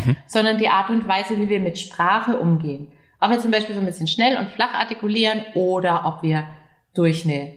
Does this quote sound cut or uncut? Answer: uncut